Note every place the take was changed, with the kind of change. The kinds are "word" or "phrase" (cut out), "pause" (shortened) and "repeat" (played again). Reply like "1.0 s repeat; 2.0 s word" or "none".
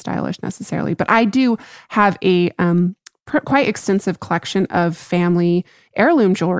none

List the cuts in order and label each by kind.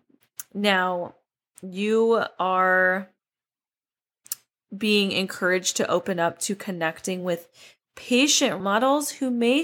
8.6 s word

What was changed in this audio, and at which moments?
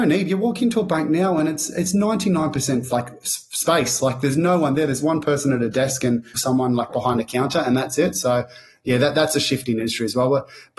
6.3 s word

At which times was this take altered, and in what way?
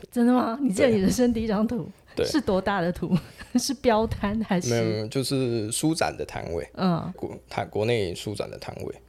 7.1 s word

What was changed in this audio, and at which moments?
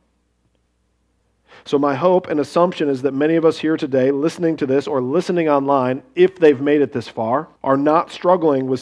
7.6 s pause

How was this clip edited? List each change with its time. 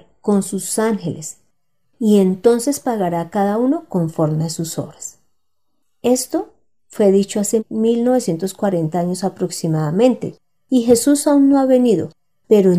none

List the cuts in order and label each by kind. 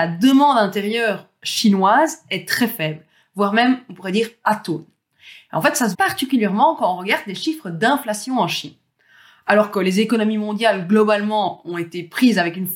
5.9 s word

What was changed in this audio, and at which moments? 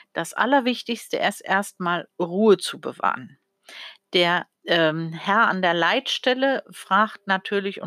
4.6 s pause

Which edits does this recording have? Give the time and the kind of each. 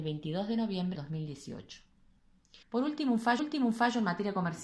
0.9 s word; 2.6 s pause; 3.4 s repeat

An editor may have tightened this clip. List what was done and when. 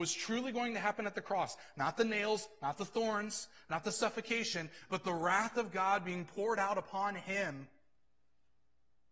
none

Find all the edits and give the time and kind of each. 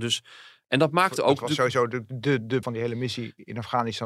2.6 s word

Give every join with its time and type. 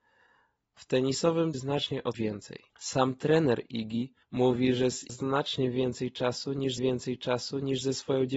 1.5 s phrase; 2.1 s word; 2.7 s pause; 4.2 s pause; 5.1 s phrase; 6.8 s repeat

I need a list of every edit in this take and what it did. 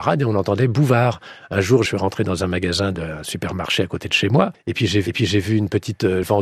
5.0 s repeat

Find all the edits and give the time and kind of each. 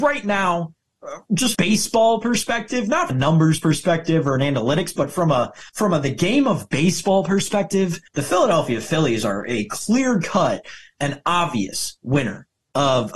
1.5 s phrase; 3.1 s word; 5.0 s word; 5.7 s pause; 8.1 s pause

